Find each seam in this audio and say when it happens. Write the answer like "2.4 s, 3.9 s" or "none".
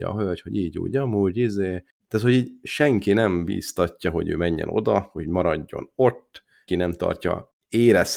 6.7 s